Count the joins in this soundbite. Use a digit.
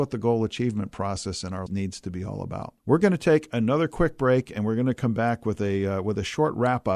2